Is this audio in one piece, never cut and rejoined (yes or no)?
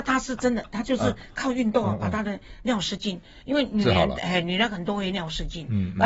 yes